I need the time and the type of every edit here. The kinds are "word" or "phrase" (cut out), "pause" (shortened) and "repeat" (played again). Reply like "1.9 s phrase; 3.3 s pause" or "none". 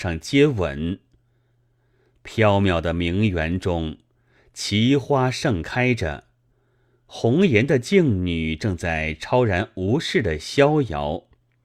none